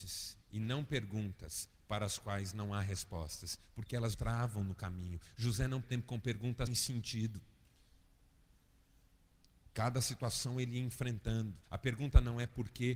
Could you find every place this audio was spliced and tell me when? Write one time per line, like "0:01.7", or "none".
0:04.1
0:05.8
0:06.7
0:11.6